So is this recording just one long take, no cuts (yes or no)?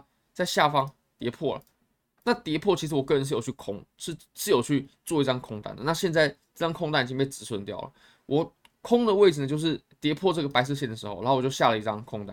yes